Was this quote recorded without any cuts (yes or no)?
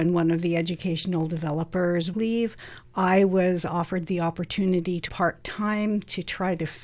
no